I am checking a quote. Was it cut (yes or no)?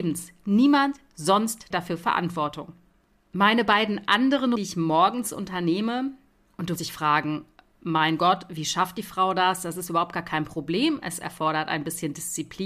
yes